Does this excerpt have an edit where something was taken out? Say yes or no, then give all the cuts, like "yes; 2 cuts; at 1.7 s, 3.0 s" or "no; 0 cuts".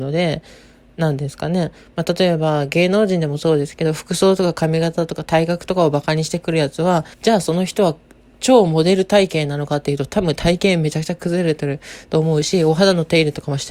yes; 1 cut; at 7.1 s